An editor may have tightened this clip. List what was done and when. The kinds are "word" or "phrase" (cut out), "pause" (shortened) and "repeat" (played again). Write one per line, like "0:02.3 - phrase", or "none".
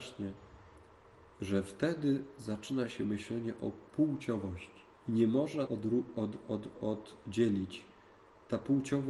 0:04.9 - pause
0:05.7 - word